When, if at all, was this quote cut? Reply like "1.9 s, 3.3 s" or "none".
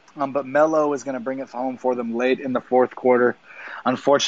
none